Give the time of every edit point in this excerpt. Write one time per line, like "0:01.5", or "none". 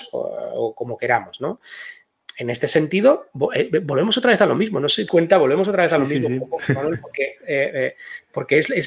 0:05.1